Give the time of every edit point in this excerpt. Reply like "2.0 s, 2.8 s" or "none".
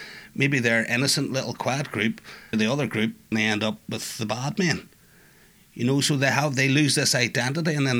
2.5 s, 3.3 s